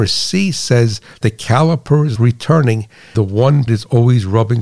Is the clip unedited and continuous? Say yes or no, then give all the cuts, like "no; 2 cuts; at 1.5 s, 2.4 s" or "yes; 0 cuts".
no; 4 cuts; at 1.2 s, 2.2 s, 3.1 s, 3.7 s